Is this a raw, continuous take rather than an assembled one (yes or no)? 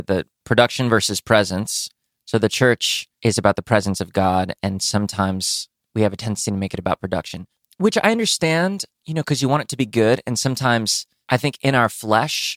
yes